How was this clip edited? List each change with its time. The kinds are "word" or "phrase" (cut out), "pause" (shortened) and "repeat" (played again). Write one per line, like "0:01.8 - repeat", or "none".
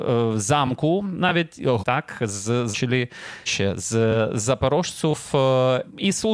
0:01.8 - word
0:02.7 - word
0:03.5 - word